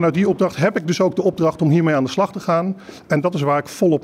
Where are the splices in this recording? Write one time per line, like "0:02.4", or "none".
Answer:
none